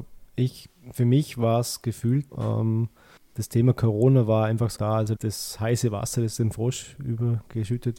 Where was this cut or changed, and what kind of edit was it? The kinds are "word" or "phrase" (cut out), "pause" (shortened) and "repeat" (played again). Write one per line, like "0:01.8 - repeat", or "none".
0:02.3 - word
0:03.2 - pause
0:04.8 - phrase
0:05.2 - word